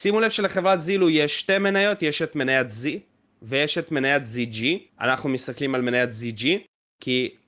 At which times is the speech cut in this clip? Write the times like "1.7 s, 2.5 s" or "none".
none